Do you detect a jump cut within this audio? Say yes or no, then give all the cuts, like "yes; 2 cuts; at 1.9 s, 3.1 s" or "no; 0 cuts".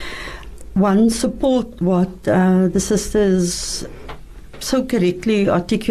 no; 0 cuts